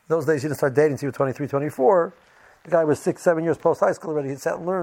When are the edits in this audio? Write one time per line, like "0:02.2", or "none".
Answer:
none